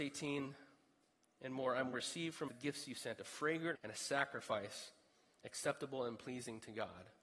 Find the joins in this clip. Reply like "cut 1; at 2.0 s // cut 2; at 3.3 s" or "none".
cut 1; at 1.9 s // cut 2; at 2.5 s // cut 3; at 3.7 s